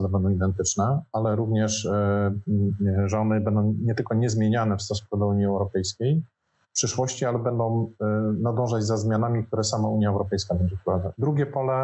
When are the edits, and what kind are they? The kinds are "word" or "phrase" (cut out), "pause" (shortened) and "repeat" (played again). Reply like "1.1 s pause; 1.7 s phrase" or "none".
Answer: none